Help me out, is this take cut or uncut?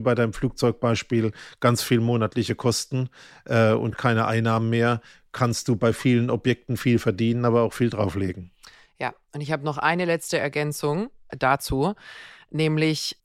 uncut